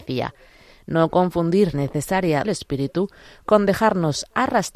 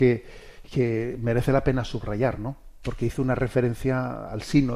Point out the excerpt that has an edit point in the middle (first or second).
first